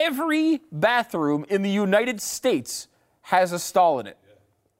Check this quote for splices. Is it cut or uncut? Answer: uncut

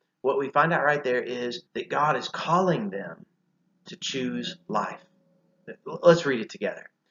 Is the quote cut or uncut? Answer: cut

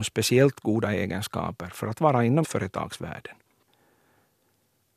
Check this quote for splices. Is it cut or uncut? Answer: cut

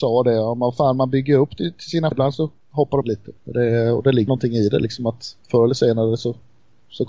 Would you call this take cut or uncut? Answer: cut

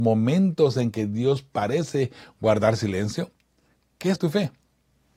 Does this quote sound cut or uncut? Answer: cut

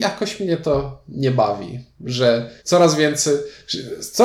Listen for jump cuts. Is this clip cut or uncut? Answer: cut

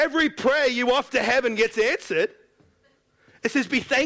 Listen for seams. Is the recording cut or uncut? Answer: cut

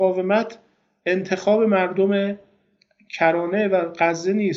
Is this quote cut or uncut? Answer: uncut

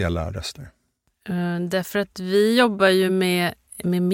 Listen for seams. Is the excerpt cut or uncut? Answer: uncut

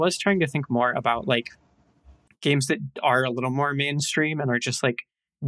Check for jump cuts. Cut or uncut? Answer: uncut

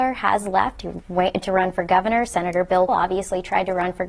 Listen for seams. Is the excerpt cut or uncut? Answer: cut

